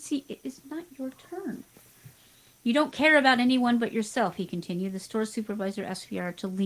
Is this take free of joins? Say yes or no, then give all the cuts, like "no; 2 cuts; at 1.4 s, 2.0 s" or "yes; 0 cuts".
yes; 0 cuts